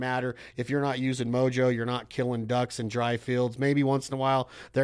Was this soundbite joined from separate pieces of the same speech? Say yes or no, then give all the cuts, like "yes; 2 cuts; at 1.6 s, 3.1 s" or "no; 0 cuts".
no; 0 cuts